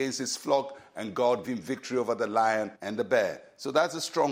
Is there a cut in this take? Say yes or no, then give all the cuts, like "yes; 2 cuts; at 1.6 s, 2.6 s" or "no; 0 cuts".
yes; 2 cuts; at 1.4 s, 2.7 s